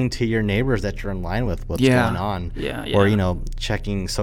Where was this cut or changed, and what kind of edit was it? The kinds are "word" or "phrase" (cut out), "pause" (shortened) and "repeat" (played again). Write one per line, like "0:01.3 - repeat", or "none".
none